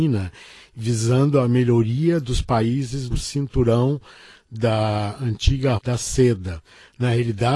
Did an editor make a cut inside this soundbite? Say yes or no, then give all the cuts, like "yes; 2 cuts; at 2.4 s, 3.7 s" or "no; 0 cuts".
yes; 2 cuts; at 3.1 s, 5.8 s